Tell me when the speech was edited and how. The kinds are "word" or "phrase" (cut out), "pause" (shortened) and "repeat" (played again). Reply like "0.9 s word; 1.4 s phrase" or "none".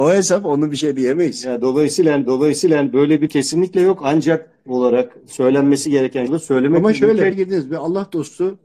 2.3 s repeat; 3.3 s word; 4.7 s word; 6.3 s phrase; 7.3 s phrase